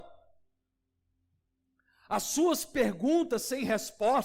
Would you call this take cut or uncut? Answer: uncut